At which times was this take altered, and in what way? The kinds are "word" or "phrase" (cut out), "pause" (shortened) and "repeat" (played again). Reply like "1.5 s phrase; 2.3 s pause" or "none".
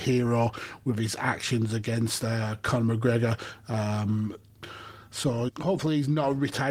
5.5 s phrase